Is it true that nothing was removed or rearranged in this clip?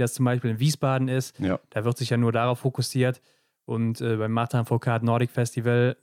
yes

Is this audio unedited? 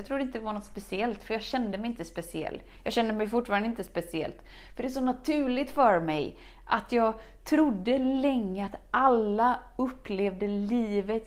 yes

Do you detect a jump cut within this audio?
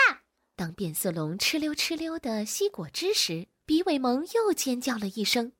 no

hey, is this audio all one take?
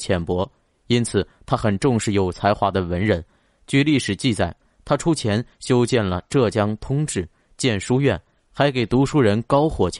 yes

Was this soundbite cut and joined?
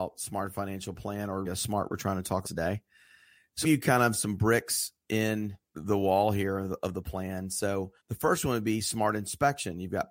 yes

